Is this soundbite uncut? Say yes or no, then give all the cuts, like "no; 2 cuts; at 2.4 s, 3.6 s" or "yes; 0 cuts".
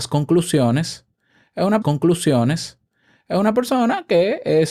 no; 1 cut; at 1.8 s